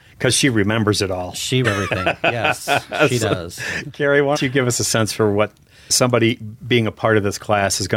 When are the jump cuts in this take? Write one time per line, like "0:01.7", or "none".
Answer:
0:01.6
0:04.4
0:05.9